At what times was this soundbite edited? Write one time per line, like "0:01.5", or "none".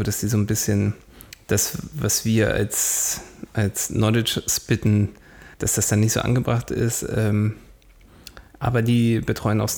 0:05.5
0:08.5